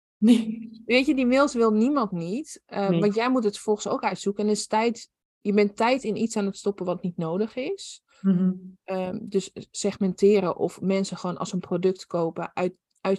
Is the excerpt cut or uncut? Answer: uncut